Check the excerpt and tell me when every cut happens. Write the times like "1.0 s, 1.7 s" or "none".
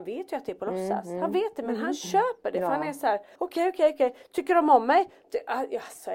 3.3 s